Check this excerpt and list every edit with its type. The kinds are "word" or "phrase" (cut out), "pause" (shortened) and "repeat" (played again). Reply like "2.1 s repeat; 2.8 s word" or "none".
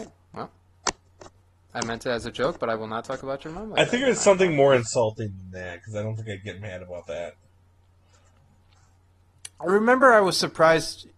none